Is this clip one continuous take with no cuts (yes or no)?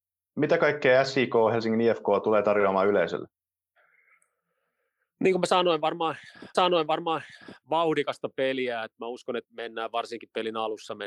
no